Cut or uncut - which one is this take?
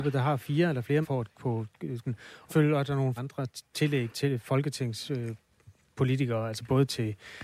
cut